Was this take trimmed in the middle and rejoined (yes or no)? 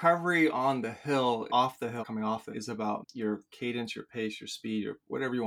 yes